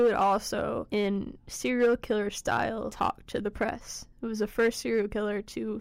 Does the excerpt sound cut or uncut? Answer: uncut